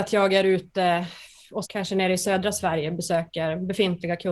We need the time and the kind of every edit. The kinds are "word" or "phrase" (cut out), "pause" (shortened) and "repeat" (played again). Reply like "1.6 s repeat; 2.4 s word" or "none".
1.6 s word